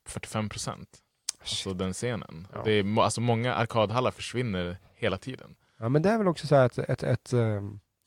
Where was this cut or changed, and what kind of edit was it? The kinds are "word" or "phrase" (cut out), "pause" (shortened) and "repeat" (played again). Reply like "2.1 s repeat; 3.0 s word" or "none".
none